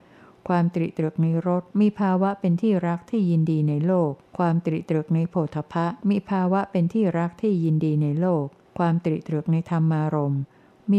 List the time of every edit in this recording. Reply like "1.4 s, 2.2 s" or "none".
1.7 s, 4.2 s, 6.0 s, 8.6 s